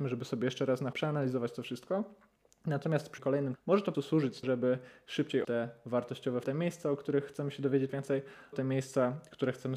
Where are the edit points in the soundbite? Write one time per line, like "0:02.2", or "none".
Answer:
0:00.9
0:03.2
0:03.5
0:03.9
0:04.4
0:05.4
0:06.4
0:07.9
0:08.5

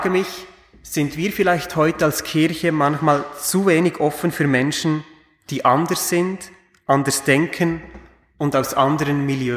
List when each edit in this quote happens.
none

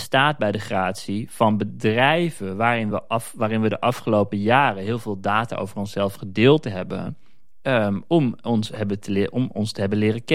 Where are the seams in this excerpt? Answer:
none

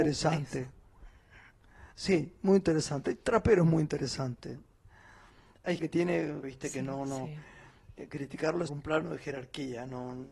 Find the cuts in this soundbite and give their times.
0:01.9
0:05.8
0:06.4
0:08.7

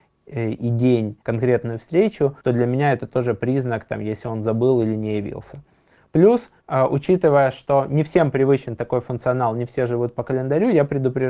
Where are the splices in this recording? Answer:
0:01.2
0:02.4
0:06.6

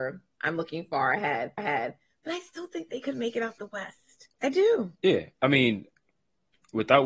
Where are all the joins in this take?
0:01.6
0:04.3
0:05.0

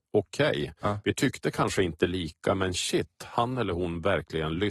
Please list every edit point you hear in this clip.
none

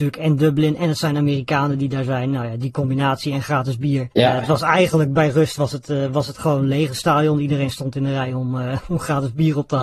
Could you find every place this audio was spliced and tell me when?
0:04.1

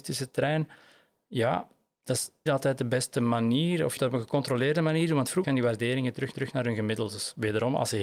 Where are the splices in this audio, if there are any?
0:02.5
0:04.0
0:05.4
0:06.3

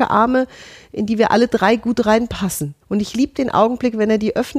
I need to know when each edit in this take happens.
0:02.8

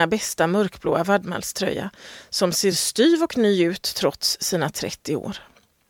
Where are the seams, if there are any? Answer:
none

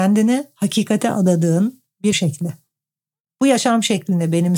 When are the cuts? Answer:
0:02.1

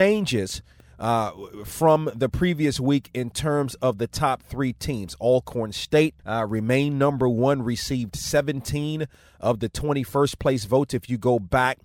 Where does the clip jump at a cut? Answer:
0:06.2

